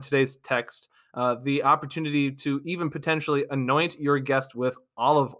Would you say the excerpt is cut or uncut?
uncut